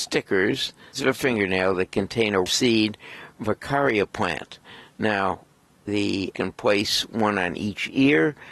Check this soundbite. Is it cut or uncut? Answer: cut